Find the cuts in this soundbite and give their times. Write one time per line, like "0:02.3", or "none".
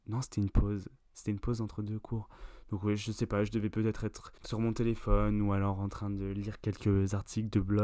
0:04.4